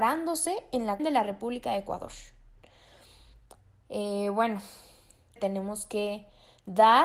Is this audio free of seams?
no; 2 cuts; at 1.0 s, 5.4 s

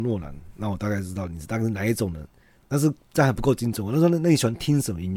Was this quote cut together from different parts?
no; 0 cuts

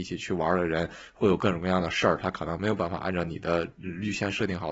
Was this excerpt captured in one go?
yes; 0 cuts

